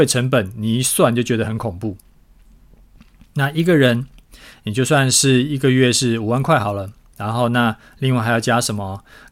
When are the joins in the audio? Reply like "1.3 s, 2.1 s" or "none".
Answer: none